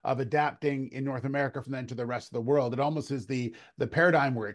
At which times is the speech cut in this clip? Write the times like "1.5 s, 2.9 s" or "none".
1.6 s